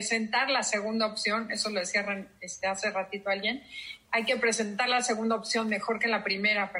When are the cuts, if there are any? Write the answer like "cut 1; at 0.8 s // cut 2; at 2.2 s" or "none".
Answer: none